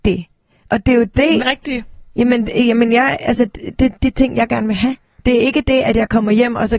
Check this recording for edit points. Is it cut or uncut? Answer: cut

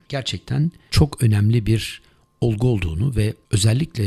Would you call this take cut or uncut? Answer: uncut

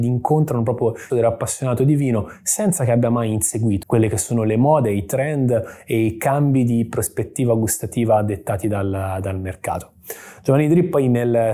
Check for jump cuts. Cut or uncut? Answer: cut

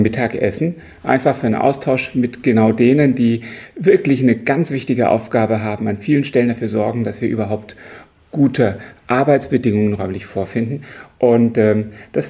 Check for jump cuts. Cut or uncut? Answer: uncut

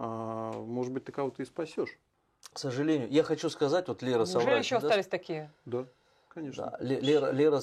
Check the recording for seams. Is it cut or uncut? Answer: uncut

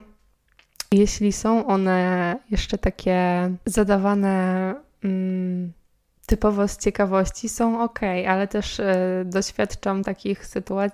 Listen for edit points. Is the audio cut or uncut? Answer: uncut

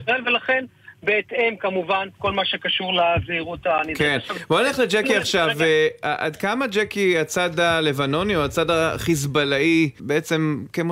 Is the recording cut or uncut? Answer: cut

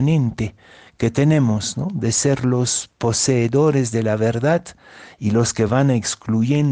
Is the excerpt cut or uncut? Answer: uncut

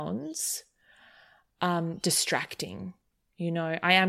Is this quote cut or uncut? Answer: uncut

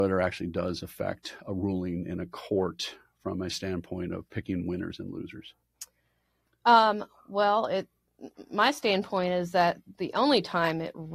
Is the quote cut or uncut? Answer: uncut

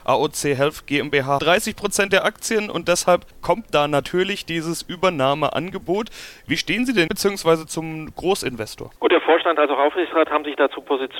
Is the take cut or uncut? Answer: cut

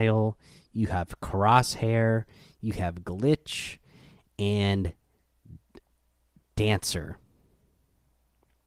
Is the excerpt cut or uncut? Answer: uncut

